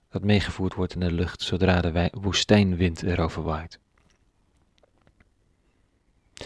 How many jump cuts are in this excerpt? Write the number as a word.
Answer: zero